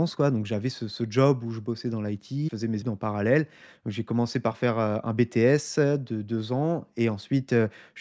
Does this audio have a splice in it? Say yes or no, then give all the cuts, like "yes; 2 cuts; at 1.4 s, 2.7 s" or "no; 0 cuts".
yes; 2 cuts; at 2.5 s, 2.8 s